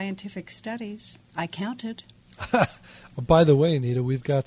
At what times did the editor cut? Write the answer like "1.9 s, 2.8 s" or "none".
2.2 s